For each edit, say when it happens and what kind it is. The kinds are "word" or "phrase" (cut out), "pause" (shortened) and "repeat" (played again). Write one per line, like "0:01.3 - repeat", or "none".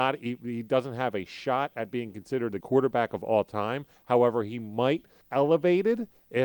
0:02.6 - word
0:05.2 - word

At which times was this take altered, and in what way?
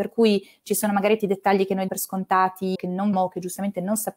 0:01.2 - word
0:01.9 - word
0:02.7 - word
0:03.1 - word

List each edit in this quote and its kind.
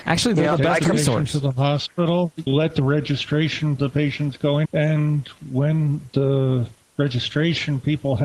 0:02.5 - word
0:03.8 - phrase
0:04.6 - word

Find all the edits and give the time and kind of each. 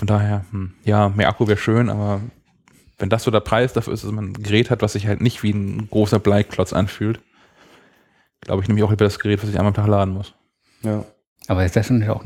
none

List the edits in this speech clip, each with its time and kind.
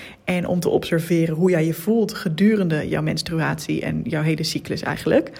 none

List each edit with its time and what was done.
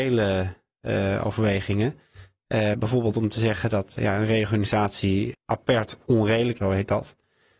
0:04.0 - word
0:06.6 - word

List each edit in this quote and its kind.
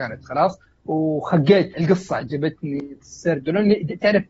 0:01.7 - word
0:03.0 - word

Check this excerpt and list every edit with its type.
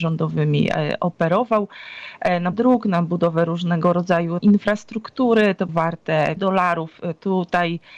0:02.5 - word
0:04.4 - word
0:05.7 - word
0:06.4 - word

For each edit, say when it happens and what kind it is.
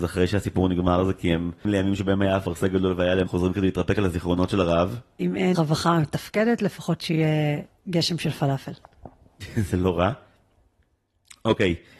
0:01.6 - word
0:03.3 - phrase
0:05.5 - word

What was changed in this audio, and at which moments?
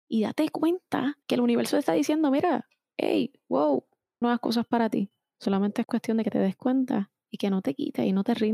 0:01.2 - pause
0:04.2 - word

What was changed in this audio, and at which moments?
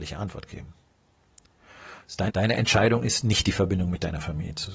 0:02.3 - word

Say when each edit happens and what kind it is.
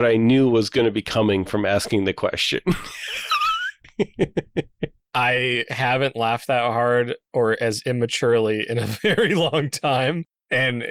none

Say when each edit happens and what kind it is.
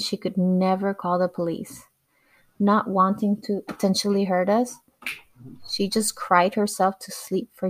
none

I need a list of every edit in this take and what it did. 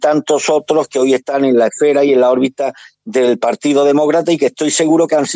none

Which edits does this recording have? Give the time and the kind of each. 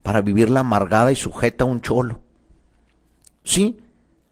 none

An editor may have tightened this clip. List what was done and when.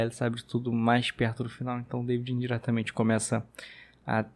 none

